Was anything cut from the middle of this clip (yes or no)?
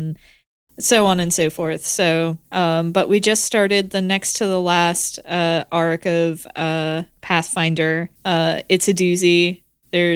yes